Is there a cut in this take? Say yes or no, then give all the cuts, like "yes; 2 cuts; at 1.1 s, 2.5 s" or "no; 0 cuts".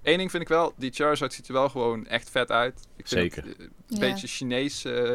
no; 0 cuts